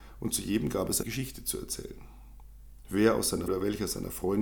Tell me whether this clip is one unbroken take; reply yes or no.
no